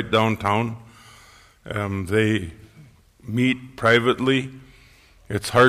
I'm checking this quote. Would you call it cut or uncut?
uncut